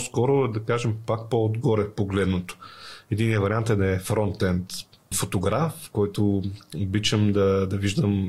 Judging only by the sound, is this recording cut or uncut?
cut